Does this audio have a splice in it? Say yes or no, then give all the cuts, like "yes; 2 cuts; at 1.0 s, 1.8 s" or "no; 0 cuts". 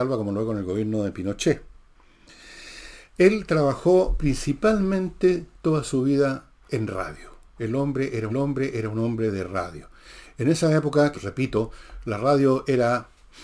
yes; 3 cuts; at 6.6 s, 8.3 s, 11.1 s